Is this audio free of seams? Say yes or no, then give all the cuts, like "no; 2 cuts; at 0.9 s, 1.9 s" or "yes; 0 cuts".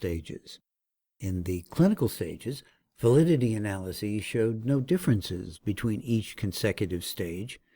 yes; 0 cuts